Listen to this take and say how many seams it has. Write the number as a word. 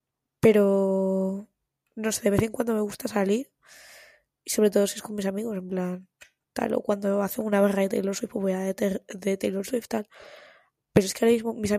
zero